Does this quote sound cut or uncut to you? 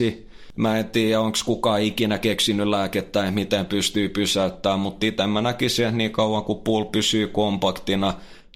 uncut